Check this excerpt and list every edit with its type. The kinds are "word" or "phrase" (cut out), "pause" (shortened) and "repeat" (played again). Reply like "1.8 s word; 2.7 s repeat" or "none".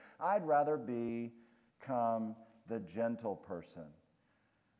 none